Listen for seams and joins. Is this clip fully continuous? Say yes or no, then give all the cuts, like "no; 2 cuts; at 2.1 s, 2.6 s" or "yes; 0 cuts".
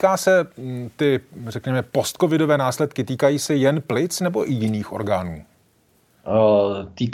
yes; 0 cuts